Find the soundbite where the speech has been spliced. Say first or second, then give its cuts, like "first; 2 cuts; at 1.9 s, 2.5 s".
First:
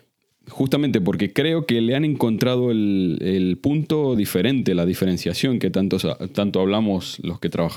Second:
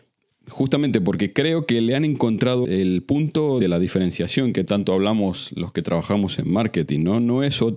second; 3 cuts; at 2.6 s, 3.6 s, 4.7 s